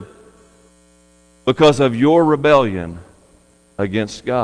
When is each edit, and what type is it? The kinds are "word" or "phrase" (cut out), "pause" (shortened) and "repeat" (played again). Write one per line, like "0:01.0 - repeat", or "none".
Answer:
none